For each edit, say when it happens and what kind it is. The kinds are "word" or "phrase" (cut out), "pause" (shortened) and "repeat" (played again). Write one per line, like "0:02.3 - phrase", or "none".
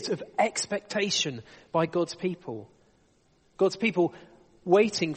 none